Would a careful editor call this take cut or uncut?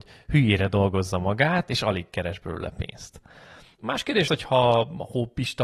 cut